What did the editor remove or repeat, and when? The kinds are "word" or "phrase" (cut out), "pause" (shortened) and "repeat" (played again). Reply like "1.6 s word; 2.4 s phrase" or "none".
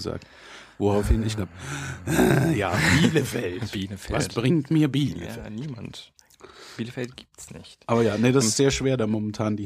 1.4 s word; 8.4 s word

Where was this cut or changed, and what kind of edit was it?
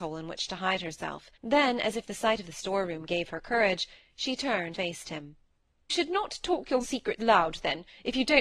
1.3 s pause; 2.4 s phrase; 4.7 s word; 5.9 s word; 6.8 s word; 7.2 s word

